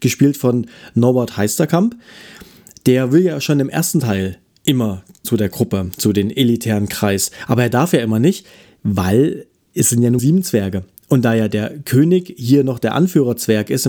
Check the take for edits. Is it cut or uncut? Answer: cut